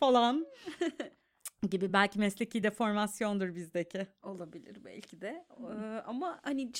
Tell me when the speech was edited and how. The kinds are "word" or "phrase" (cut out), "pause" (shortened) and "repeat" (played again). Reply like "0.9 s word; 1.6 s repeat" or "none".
none